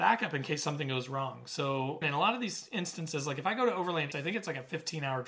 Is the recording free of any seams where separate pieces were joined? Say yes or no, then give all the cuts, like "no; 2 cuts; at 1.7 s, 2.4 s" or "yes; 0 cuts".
no; 2 cuts; at 2.0 s, 4.1 s